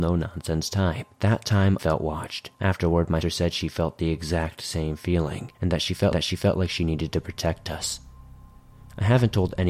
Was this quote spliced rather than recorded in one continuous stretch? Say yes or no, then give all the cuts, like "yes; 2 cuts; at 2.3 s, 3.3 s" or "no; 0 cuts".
yes; 6 cuts; at 1.1 s, 1.8 s, 2.5 s, 3.2 s, 5.5 s, 6.1 s